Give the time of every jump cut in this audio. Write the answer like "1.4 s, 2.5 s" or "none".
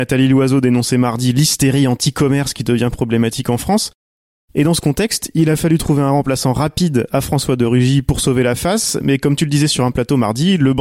none